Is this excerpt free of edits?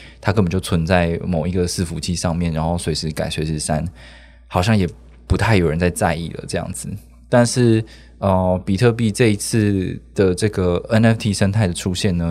yes; 0 cuts

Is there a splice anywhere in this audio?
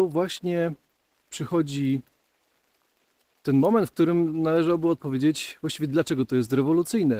no; 0 cuts

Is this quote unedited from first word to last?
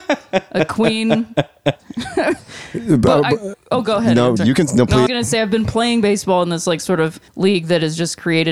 no; 3 cuts; at 4.4 s, 5.1 s, 7.3 s

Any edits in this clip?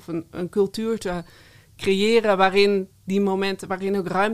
no; 0 cuts

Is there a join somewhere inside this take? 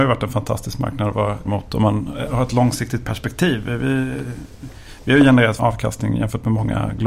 yes; 3 cuts; at 1.5 s, 2.3 s, 5.6 s

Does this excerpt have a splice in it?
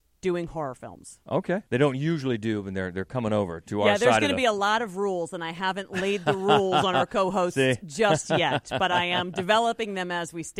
yes; 1 cut; at 1.7 s

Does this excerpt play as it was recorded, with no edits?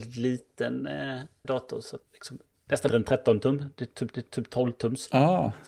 no; 4 cuts; at 1.4 s, 2.0 s, 2.9 s, 4.1 s

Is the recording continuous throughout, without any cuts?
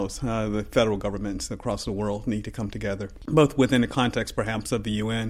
yes; 0 cuts

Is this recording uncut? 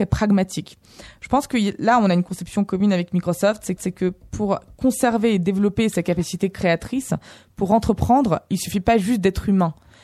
no; 1 cut; at 3.8 s

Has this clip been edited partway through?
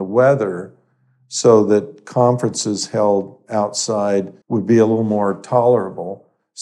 yes; 1 cut; at 4.4 s

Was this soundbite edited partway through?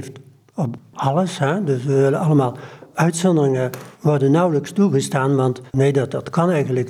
yes; 2 cuts; at 3.9 s, 5.7 s

